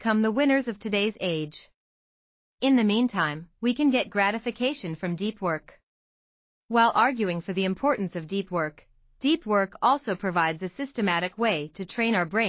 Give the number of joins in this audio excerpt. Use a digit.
0